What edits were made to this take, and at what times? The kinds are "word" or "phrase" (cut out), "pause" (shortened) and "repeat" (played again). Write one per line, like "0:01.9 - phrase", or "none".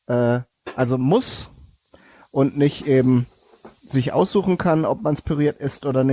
none